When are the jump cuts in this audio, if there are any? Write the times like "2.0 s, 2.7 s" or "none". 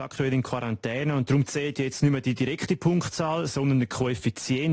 none